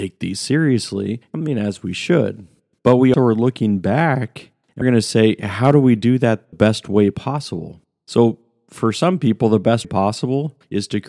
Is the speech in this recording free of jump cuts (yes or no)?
no